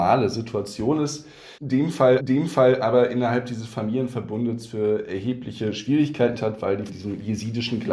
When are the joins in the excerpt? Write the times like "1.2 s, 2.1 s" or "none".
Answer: 1.6 s, 2.2 s, 6.4 s, 6.9 s